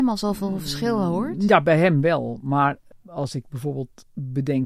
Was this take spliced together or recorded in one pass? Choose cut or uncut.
uncut